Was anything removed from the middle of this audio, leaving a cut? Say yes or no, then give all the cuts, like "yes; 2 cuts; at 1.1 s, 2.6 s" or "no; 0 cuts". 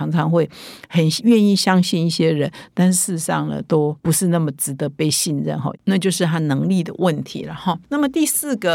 yes; 1 cut; at 4.0 s